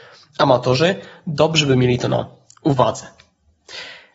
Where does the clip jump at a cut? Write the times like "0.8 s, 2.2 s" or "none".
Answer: none